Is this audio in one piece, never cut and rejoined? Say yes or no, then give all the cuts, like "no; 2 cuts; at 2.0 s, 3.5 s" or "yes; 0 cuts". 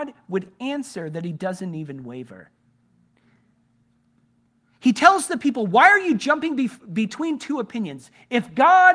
yes; 0 cuts